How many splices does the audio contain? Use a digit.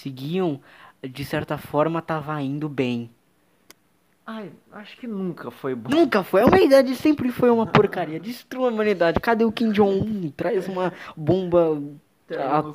0